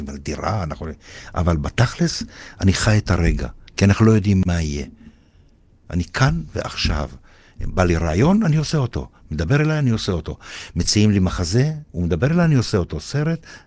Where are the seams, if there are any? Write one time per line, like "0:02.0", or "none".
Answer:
0:03.7